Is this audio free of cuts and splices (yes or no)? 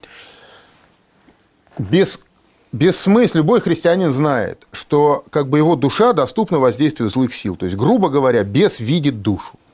yes